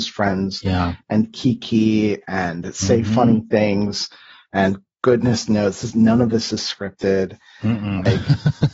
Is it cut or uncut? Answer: uncut